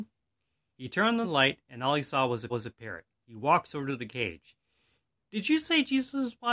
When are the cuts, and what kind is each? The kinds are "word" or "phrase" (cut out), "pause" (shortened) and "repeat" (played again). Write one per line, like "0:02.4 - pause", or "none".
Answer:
0:01.2 - word
0:02.5 - repeat